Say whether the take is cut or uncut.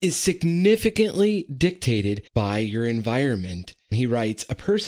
cut